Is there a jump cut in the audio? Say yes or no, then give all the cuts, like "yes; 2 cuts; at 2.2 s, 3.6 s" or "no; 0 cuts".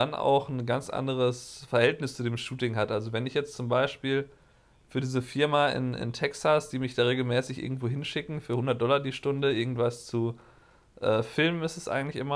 no; 0 cuts